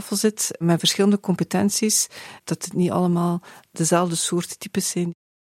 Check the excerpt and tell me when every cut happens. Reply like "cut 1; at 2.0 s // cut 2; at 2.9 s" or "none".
none